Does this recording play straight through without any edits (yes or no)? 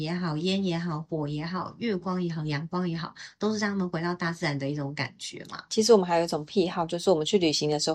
yes